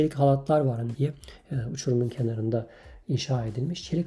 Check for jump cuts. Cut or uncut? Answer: cut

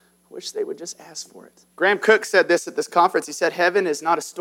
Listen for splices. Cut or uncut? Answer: cut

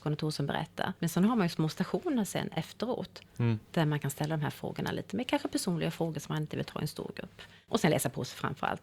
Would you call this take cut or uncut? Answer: cut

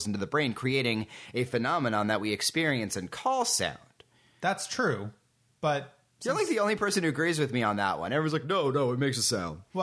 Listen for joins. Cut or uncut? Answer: uncut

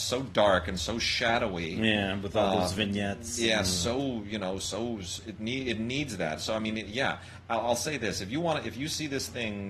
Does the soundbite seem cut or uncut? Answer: uncut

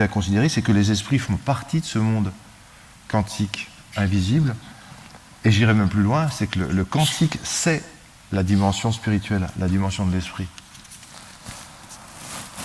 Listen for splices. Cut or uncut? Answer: uncut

